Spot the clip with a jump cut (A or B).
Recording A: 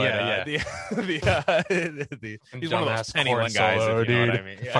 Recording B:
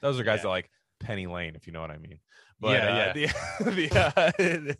A